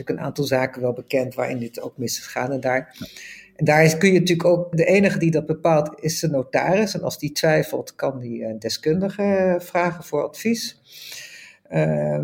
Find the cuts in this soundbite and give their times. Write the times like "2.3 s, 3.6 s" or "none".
4.7 s